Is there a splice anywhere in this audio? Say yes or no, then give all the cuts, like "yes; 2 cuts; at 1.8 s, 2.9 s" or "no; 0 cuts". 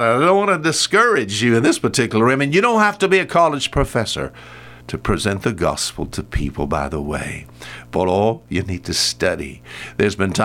yes; 1 cut; at 4.8 s